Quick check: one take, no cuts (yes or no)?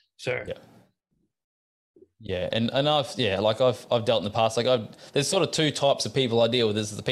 yes